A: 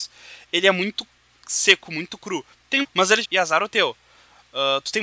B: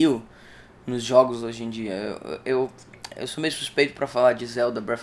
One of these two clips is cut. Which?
A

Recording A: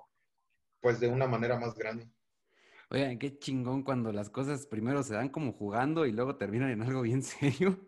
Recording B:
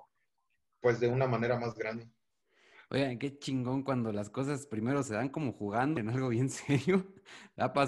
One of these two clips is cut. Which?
B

